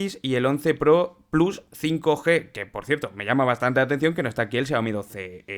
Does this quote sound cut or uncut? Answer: uncut